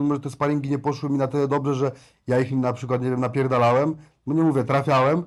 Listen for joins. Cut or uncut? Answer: uncut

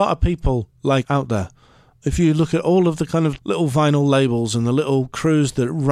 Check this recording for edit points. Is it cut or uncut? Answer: cut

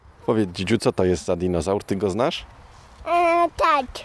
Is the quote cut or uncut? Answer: uncut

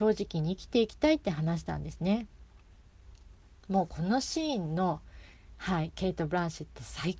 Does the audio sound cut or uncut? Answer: uncut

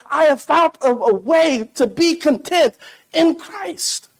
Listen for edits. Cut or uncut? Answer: uncut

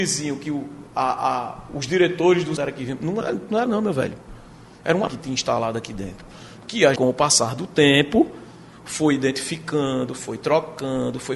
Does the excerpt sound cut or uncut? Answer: cut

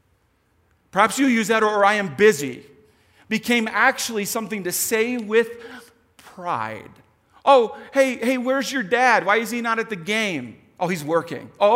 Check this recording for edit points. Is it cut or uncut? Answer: uncut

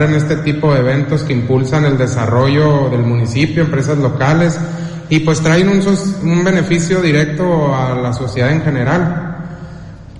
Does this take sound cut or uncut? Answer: uncut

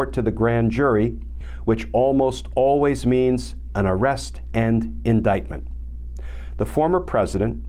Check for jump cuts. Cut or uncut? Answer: uncut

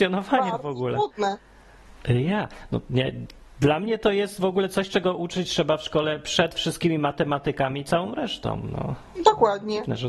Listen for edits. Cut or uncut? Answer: uncut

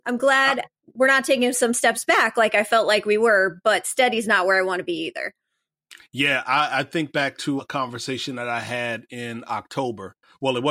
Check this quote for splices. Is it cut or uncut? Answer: cut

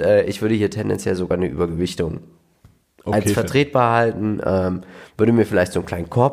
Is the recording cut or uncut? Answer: uncut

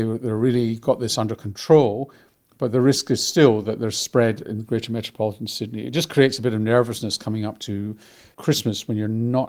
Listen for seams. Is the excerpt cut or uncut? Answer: uncut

